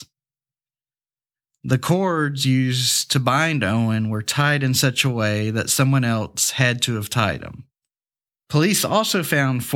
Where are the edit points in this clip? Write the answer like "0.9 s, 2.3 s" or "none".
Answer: none